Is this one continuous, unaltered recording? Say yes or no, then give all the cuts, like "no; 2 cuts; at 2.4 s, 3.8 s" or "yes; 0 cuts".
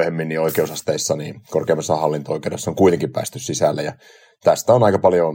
yes; 0 cuts